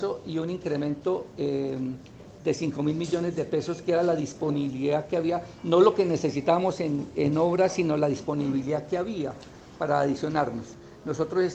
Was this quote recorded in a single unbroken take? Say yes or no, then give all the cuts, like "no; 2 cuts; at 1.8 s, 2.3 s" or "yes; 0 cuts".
yes; 0 cuts